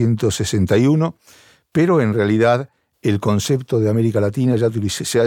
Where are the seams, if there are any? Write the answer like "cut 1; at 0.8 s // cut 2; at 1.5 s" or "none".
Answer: none